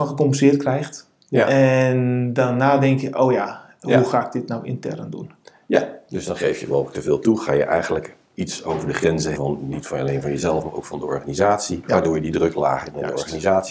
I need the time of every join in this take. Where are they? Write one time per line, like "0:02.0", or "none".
0:09.3